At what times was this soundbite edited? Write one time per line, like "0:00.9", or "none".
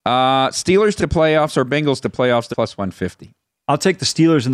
0:01.0
0:02.0
0:02.5